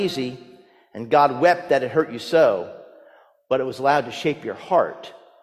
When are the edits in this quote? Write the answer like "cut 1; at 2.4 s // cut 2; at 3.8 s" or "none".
none

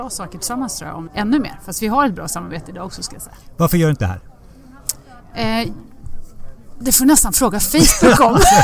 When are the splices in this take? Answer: cut 1; at 1.1 s // cut 2; at 4.0 s // cut 3; at 6.8 s

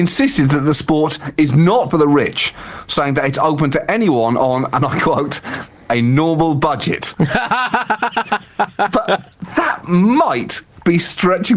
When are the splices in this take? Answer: cut 1; at 1.9 s

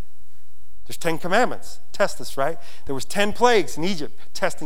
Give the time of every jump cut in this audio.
none

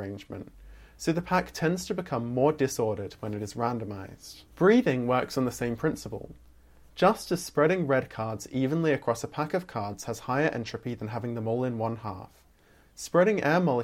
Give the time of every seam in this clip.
cut 1; at 4.5 s

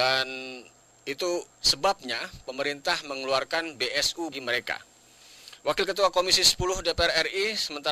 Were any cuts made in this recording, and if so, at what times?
cut 1; at 1.5 s // cut 2; at 4.3 s

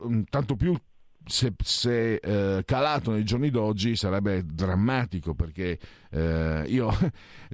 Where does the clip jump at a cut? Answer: none

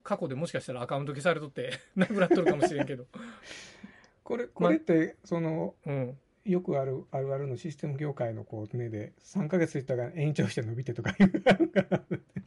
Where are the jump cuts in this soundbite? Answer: cut 1; at 3.4 s // cut 2; at 5.8 s // cut 3; at 6.3 s // cut 4; at 9.1 s

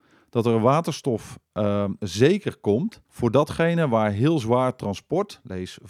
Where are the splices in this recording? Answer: cut 1; at 3.0 s

